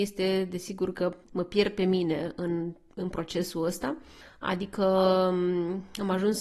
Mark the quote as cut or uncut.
uncut